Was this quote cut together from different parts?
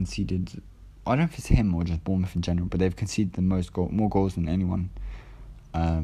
no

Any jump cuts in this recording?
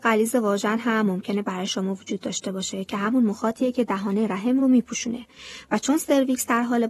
no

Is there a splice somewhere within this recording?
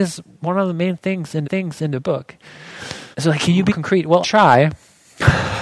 yes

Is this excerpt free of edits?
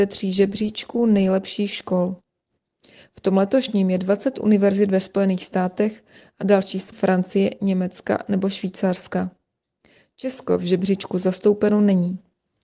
no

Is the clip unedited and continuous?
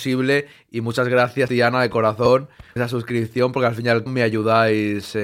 no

